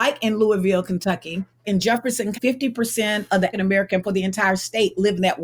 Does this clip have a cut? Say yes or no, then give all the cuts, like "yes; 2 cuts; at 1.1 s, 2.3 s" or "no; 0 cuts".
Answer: yes; 4 cuts; at 1.6 s, 2.3 s, 3.5 s, 4.0 s